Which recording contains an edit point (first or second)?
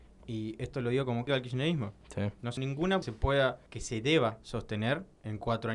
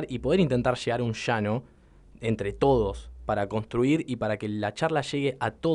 first